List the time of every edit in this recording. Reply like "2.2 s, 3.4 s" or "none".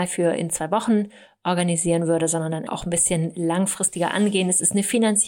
2.7 s